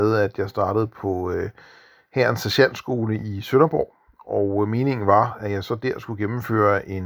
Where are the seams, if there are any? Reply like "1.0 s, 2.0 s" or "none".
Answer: none